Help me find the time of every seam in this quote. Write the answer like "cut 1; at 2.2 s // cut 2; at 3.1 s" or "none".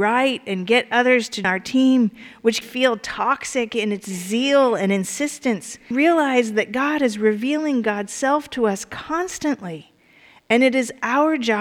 cut 1; at 1.4 s // cut 2; at 2.6 s // cut 3; at 5.9 s

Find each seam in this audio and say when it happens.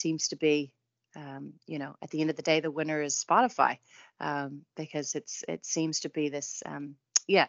none

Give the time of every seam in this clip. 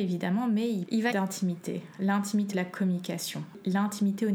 cut 1; at 1.1 s // cut 2; at 2.5 s

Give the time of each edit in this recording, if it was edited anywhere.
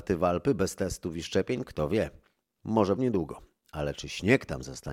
cut 1; at 3.0 s

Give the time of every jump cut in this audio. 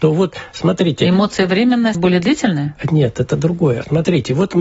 cut 1; at 1.9 s

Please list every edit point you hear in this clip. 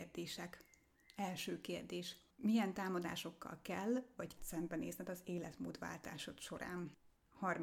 cut 1; at 4.4 s

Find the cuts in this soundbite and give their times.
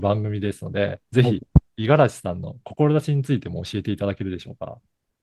cut 1; at 1.1 s

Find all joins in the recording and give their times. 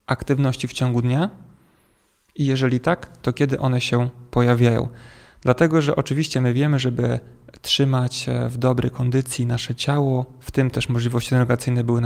none

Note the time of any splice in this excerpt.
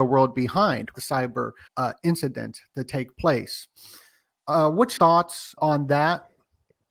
cut 1; at 0.9 s // cut 2; at 1.7 s // cut 3; at 5.0 s // cut 4; at 5.6 s

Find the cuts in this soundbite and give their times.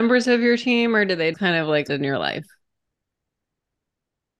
cut 1; at 1.3 s // cut 2; at 1.9 s

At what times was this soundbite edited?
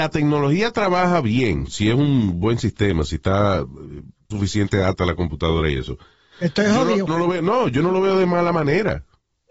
cut 1; at 1.7 s // cut 2; at 4.3 s // cut 3; at 7.1 s

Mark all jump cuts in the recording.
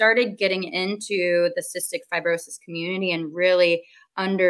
none

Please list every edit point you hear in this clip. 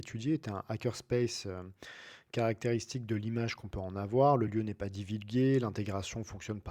none

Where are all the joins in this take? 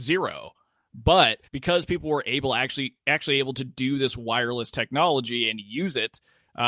cut 1; at 1.5 s

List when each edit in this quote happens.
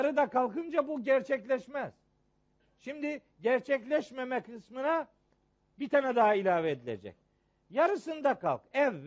none

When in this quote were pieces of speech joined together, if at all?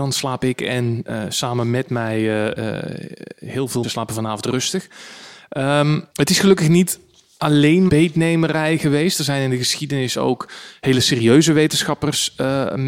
cut 1; at 3.8 s // cut 2; at 6.1 s // cut 3; at 7.9 s

